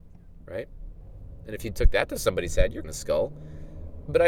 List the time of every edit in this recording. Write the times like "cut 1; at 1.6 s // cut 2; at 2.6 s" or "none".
cut 1; at 2.8 s

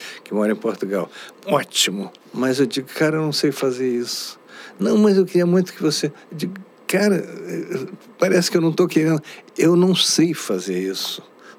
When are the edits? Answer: none

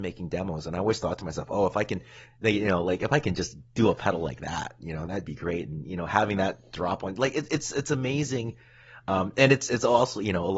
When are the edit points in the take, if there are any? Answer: none

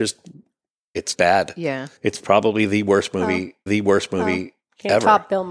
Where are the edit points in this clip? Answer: cut 1; at 1.1 s // cut 2; at 2.0 s // cut 3; at 3.7 s

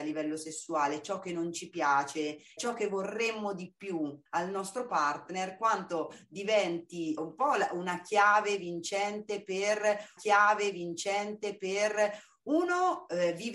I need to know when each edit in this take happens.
cut 1; at 2.6 s // cut 2; at 4.3 s // cut 3; at 7.2 s // cut 4; at 10.2 s

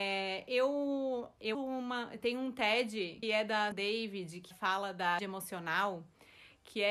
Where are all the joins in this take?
cut 1; at 1.5 s // cut 2; at 3.2 s // cut 3; at 3.7 s // cut 4; at 4.5 s // cut 5; at 5.2 s

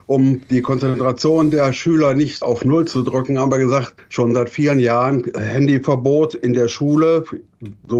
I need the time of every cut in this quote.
none

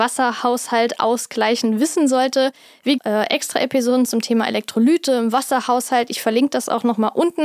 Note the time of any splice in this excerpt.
cut 1; at 3.0 s

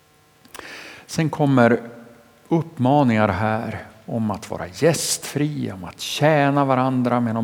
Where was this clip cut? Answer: none

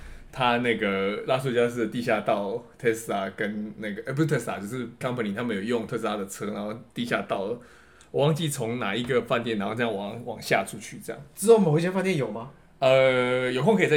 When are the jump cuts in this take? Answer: cut 1; at 5.0 s

